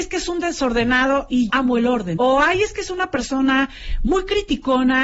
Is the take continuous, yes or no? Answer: no